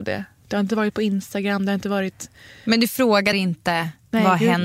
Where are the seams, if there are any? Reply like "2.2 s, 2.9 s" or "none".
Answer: 3.3 s